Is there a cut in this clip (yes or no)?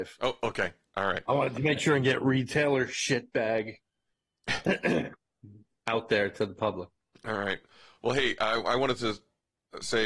no